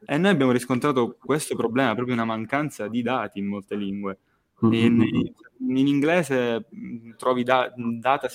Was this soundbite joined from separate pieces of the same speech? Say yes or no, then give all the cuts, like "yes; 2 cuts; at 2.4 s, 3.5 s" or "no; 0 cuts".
no; 0 cuts